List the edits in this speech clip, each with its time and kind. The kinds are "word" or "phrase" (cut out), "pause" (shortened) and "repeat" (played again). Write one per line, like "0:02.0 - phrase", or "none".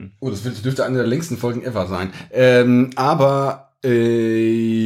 none